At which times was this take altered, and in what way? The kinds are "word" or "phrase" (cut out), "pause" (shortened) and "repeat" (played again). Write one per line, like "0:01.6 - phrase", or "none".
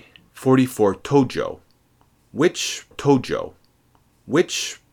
0:02.9 - repeat